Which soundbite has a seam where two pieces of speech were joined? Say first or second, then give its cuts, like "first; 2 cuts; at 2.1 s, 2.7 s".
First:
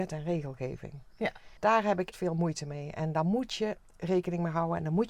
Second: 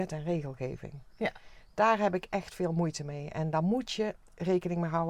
first; 2 cuts; at 1.6 s, 2.1 s